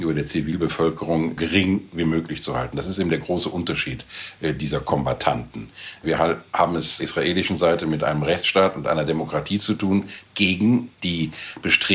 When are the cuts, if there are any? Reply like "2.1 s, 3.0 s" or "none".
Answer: 1.4 s, 7.0 s, 10.3 s, 10.9 s